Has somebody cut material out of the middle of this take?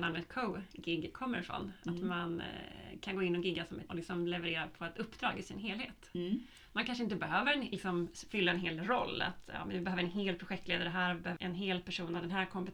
yes; 2 cuts; at 3.9 s, 11.4 s

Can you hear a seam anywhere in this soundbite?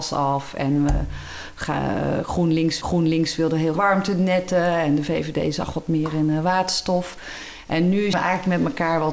yes; 3 cuts; at 2.8 s, 3.8 s, 8.1 s

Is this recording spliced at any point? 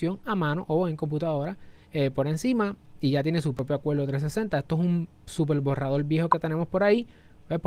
no; 0 cuts

